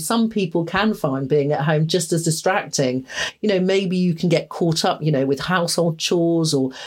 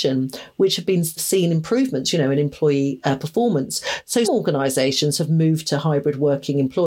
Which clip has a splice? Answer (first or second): second